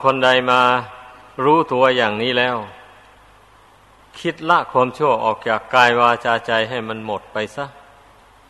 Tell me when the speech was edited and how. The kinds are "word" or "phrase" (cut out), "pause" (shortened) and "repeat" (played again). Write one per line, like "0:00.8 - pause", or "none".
none